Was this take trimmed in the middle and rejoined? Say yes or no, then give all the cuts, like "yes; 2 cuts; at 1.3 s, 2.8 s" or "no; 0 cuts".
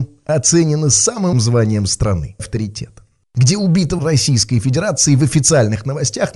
yes; 3 cuts; at 1.3 s, 2.4 s, 4.0 s